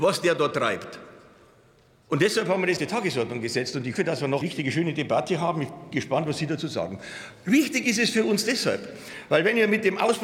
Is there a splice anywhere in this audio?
yes; 4 cuts; at 2.8 s, 3.9 s, 4.4 s, 5.9 s

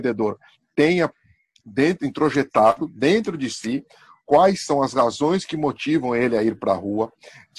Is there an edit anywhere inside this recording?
no; 0 cuts

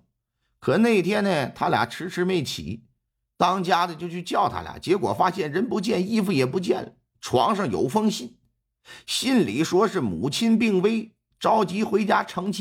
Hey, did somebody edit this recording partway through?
no; 0 cuts

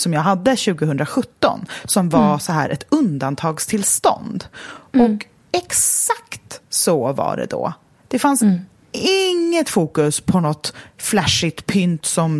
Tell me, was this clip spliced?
no; 0 cuts

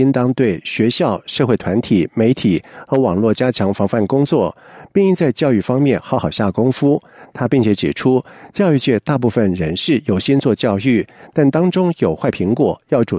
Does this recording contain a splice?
no; 0 cuts

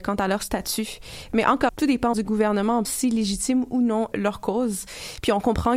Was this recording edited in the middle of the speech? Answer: yes; 4 cuts; at 1.7 s, 2.1 s, 2.8 s, 4.1 s

